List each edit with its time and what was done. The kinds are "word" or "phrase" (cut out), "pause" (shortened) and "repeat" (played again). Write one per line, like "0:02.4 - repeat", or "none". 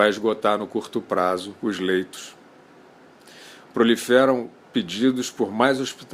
0:01.6 - pause